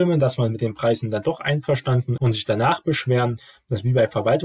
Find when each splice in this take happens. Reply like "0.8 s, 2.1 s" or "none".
2.2 s